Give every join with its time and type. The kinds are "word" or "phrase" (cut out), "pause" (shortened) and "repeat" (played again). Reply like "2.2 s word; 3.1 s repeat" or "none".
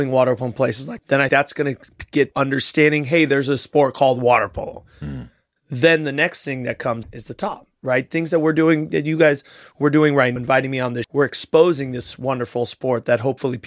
1.0 s word; 1.3 s word; 2.3 s word; 7.0 s word; 10.4 s word; 11.0 s word

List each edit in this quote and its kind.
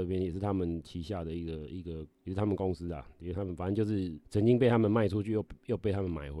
2.1 s pause; 4.3 s pause

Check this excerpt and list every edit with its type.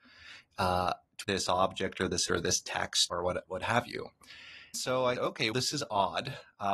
1.2 s word; 2.3 s word; 3.1 s word; 3.5 s word; 4.7 s word; 5.2 s word; 5.5 s word

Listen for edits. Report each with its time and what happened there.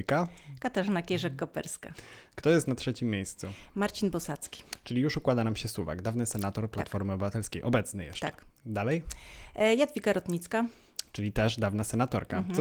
none

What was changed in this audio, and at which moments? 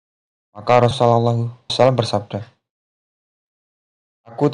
0.9 s word; 1.7 s word

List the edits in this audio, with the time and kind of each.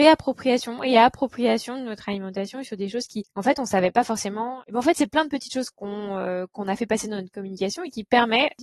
none

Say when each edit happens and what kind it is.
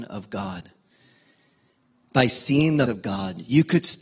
2.9 s word

